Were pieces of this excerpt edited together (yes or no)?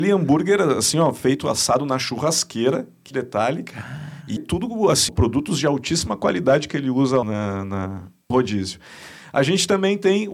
yes